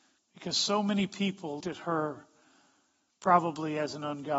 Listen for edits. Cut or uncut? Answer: cut